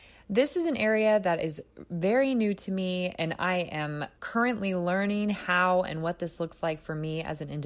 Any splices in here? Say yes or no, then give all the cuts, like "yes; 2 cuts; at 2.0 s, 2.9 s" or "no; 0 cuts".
yes; 1 cut; at 4.2 s